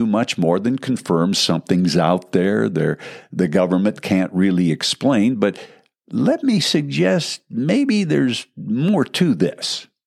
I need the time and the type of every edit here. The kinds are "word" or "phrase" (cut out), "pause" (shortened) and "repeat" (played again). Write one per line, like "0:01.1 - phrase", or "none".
none